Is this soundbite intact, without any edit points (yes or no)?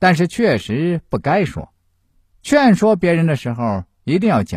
no